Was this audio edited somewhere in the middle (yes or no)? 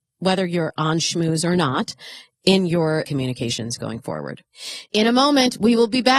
yes